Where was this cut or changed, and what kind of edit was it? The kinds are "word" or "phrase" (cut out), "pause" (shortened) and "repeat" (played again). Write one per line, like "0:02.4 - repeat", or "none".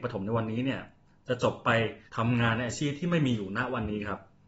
0:02.1 - pause